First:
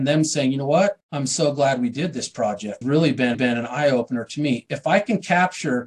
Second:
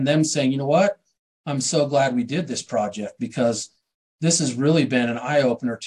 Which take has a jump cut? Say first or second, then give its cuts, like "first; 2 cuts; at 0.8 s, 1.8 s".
first; 3 cuts; at 1.0 s, 2.8 s, 3.3 s